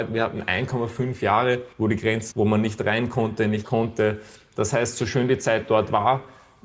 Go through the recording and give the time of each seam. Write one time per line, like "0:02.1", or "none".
0:01.7
0:02.3
0:03.6